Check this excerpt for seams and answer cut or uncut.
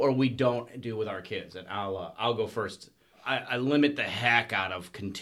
uncut